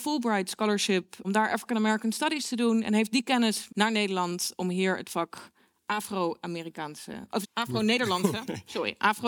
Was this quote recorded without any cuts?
no; 3 cuts; at 1.2 s, 3.7 s, 7.4 s

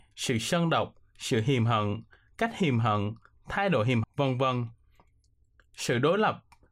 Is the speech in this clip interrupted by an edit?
yes; 1 cut; at 4.0 s

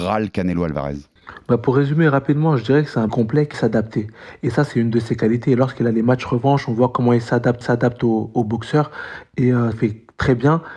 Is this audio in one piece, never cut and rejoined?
no; 4 cuts; at 3.1 s, 3.5 s, 7.6 s, 9.7 s

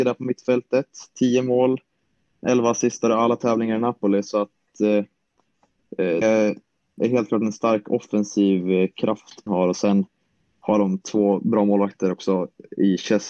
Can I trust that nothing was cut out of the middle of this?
no; 3 cuts; at 2.4 s, 6.2 s, 9.5 s

